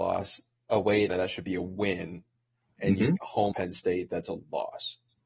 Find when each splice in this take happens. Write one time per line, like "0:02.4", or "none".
0:01.1
0:03.2
0:03.5